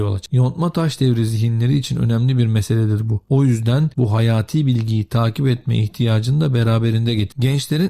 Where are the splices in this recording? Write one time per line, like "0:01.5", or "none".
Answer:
none